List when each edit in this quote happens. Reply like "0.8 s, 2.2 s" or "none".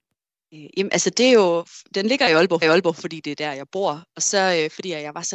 1.9 s, 2.6 s